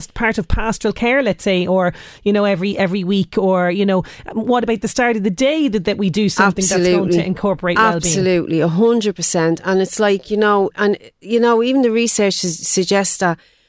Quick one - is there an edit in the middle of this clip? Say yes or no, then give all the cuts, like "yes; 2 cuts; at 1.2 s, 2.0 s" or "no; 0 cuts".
no; 0 cuts